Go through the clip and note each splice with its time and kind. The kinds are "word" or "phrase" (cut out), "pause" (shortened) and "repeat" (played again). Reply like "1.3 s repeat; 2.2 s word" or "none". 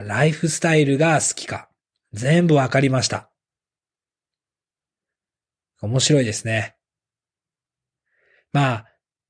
1.8 s pause